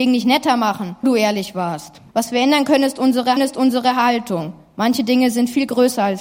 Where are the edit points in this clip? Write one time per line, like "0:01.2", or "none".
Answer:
0:01.0
0:02.1
0:03.4